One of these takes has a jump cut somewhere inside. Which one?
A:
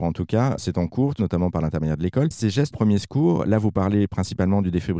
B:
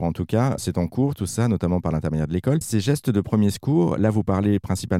A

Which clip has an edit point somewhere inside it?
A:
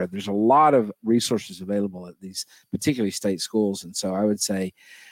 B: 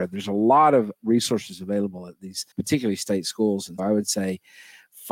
B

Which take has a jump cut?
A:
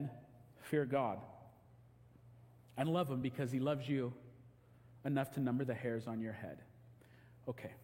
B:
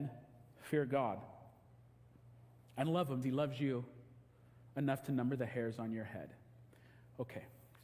B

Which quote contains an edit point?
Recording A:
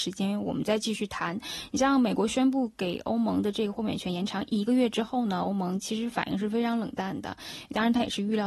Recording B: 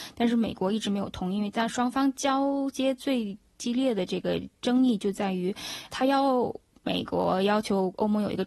B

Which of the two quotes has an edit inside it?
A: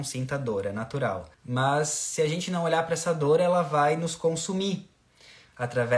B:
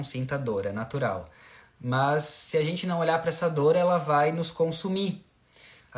A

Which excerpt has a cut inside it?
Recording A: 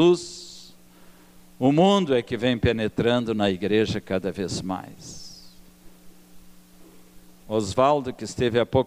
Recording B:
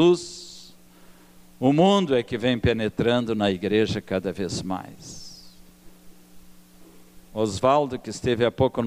B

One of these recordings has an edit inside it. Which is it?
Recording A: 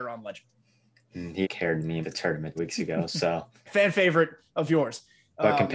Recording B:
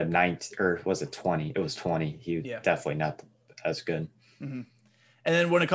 A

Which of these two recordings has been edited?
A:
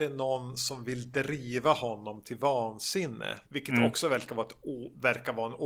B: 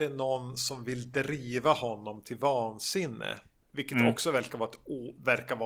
A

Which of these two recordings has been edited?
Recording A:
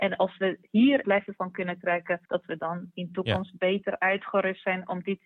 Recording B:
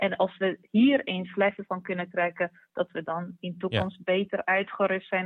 A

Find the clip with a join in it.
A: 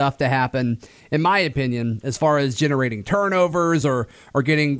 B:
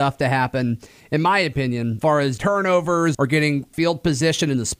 B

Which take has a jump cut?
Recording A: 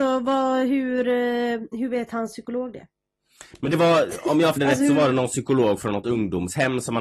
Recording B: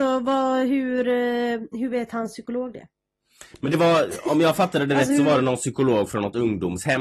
A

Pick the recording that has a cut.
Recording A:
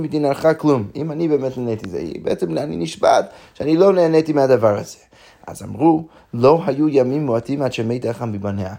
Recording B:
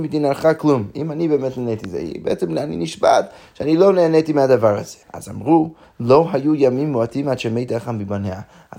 B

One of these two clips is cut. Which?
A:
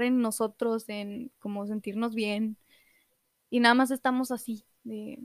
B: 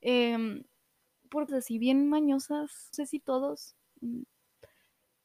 B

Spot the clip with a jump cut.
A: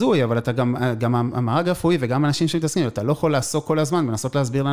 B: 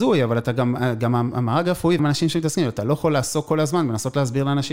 B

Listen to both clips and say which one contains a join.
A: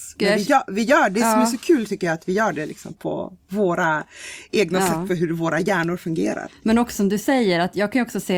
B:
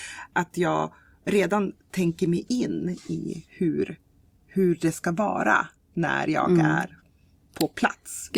A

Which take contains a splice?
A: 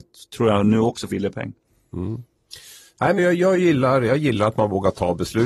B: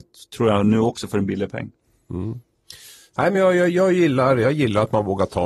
A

